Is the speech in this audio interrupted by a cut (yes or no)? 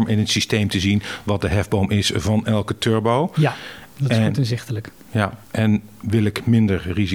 yes